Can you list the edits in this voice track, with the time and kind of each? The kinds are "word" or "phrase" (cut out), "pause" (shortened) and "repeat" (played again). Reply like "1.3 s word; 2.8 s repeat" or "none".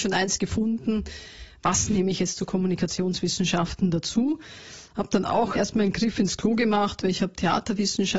5.5 s word

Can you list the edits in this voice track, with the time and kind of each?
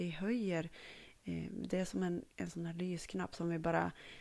2.3 s pause

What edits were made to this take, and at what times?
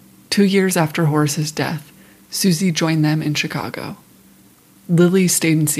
none

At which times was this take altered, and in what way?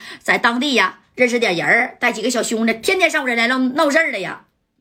1.1 s phrase

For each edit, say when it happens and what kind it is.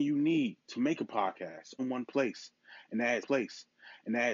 1.8 s word; 3.2 s repeat

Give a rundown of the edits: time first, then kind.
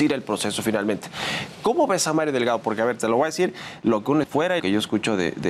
4.2 s word; 4.6 s word

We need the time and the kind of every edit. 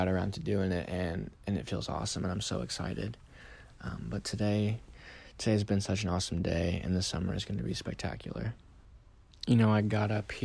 none

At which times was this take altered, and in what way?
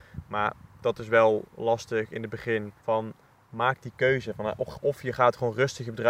2.8 s pause

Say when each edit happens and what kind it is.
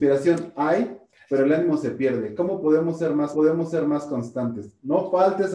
3.3 s repeat

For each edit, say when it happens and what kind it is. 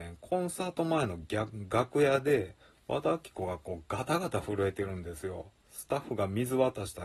5.6 s pause

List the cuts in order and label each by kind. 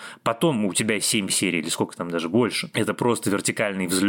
none

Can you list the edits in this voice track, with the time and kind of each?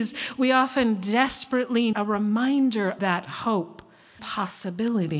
1.9 s word; 3.0 s word; 4.2 s word

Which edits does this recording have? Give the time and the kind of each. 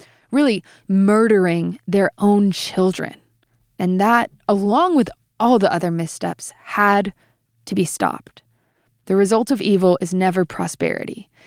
none

